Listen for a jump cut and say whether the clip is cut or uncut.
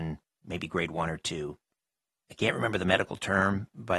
uncut